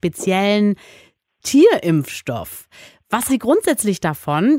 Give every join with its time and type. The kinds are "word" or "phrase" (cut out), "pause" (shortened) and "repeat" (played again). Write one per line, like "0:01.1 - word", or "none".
0:03.3 - word

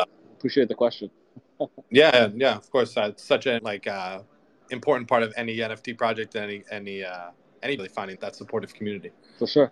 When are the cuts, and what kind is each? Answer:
0:03.6 - word
0:05.3 - word
0:07.8 - phrase
0:08.1 - word

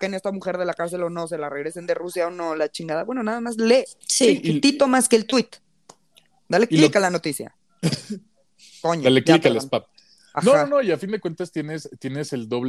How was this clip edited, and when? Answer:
0:04.0 - pause

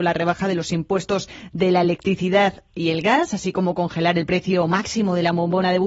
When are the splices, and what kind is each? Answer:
none

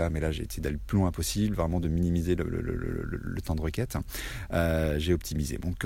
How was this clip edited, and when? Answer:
none

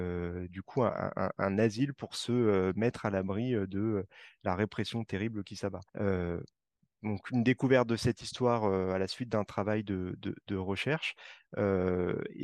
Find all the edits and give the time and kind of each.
0:05.9 - pause

